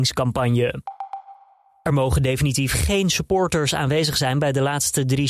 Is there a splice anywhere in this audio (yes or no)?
no